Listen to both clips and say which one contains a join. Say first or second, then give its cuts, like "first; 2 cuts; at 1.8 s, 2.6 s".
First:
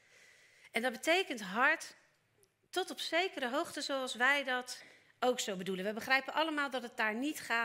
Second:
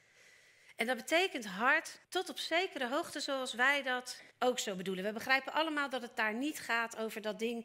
second; 2 cuts; at 2.0 s, 4.3 s